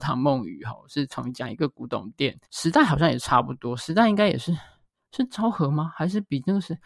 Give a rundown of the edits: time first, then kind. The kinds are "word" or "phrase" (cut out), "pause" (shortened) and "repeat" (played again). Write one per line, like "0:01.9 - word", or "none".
0:02.5 - pause